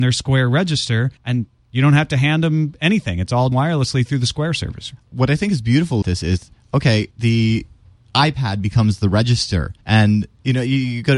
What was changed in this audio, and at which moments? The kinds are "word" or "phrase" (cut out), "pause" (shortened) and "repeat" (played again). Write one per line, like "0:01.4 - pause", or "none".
0:01.2 - pause
0:03.5 - word
0:06.0 - word
0:07.1 - pause
0:09.8 - pause